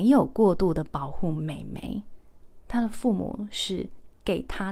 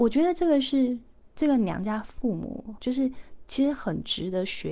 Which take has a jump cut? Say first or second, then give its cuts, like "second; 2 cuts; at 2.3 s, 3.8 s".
second; 1 cut; at 2.8 s